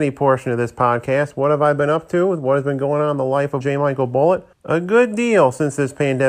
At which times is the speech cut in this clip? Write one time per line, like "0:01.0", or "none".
0:03.6
0:04.5